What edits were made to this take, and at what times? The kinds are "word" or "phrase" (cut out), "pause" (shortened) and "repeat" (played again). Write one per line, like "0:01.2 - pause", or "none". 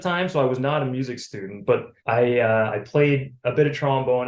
0:02.0 - pause